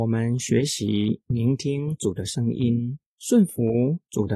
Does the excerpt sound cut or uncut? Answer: cut